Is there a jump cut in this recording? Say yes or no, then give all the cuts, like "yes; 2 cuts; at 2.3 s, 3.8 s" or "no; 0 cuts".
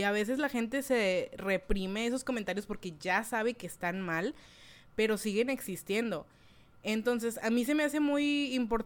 no; 0 cuts